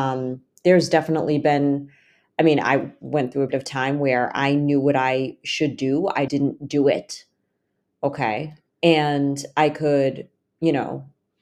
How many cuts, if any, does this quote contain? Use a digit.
2